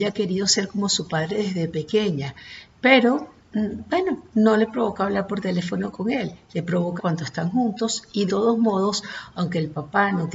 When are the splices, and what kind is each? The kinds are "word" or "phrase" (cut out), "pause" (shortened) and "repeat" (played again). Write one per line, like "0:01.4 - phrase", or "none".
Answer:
0:07.0 - phrase
0:08.3 - word